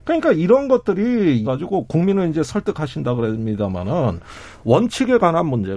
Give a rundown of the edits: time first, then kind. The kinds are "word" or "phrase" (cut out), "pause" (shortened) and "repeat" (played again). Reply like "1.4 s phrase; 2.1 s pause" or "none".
1.4 s phrase